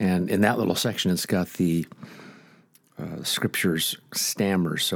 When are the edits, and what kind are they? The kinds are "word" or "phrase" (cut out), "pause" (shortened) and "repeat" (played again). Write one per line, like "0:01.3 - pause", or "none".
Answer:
none